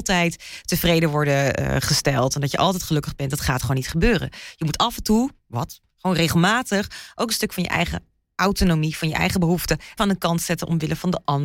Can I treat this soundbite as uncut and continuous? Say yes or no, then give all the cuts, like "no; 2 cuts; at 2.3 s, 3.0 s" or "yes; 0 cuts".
no; 1 cut; at 10.0 s